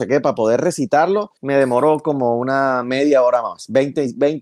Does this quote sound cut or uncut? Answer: cut